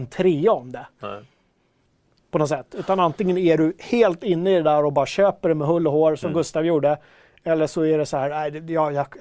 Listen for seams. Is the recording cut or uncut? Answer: uncut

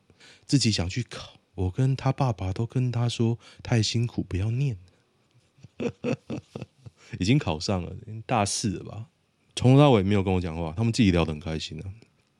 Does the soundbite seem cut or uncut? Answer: cut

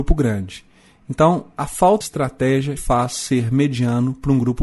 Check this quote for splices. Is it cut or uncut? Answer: cut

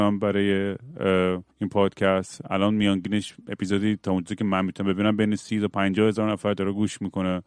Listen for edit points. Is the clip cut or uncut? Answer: cut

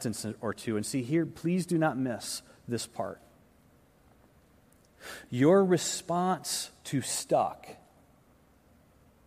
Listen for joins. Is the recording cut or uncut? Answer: uncut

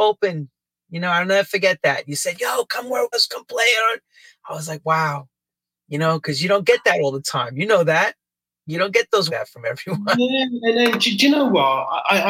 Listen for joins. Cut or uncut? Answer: cut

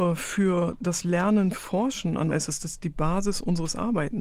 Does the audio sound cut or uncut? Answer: cut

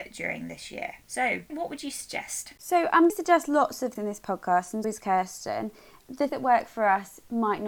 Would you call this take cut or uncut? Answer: cut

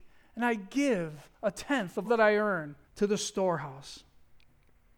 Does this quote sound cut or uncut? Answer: cut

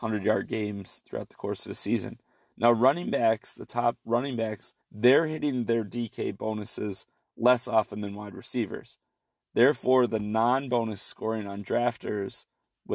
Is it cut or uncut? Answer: cut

